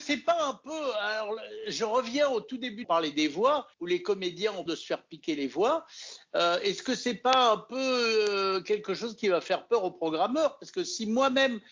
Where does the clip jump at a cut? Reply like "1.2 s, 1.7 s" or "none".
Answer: 2.8 s, 3.7 s, 4.7 s